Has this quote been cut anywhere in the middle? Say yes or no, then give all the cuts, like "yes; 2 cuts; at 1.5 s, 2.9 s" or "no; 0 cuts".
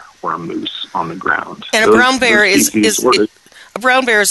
no; 0 cuts